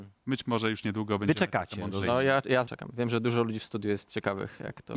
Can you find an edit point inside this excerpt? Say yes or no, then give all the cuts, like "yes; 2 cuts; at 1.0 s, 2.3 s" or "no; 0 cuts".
yes; 1 cut; at 2.7 s